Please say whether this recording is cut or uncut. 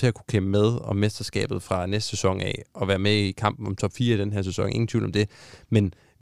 uncut